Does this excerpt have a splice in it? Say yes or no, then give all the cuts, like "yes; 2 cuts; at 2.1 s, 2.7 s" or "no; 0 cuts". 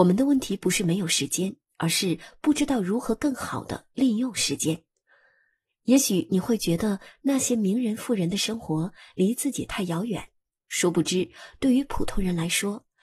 no; 0 cuts